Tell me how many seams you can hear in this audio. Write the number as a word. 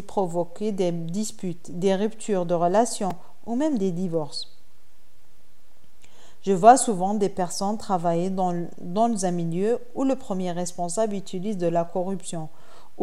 zero